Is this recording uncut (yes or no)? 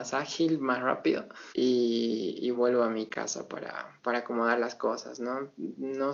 no